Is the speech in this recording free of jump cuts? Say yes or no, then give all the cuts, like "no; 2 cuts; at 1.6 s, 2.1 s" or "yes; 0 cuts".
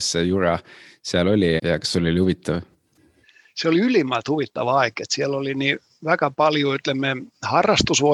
no; 1 cut; at 1.6 s